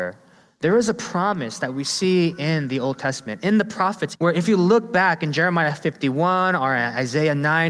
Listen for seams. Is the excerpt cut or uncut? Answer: cut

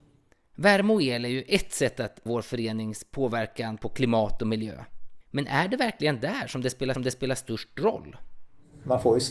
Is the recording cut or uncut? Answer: cut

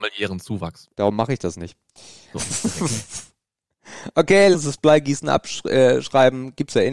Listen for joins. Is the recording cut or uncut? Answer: cut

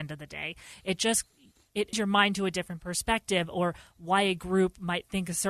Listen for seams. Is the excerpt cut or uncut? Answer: cut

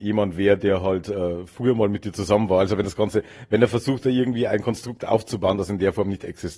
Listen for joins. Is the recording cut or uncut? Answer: uncut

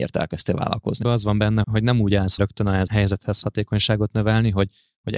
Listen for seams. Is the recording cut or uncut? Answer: cut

